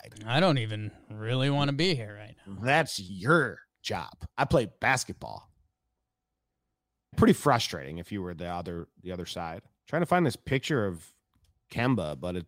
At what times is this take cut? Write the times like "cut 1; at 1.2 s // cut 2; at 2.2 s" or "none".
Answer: cut 1; at 4.3 s // cut 2; at 7.1 s // cut 3; at 9.8 s